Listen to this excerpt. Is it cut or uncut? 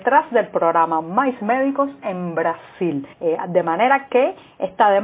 cut